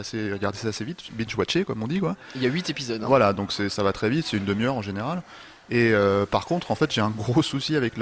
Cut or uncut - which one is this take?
uncut